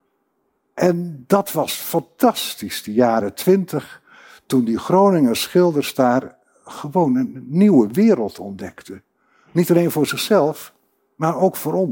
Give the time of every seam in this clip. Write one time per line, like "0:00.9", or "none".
none